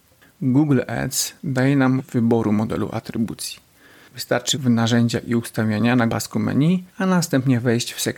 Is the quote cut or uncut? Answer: cut